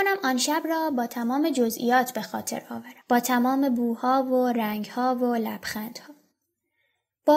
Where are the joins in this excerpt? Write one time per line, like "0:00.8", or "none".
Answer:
0:03.0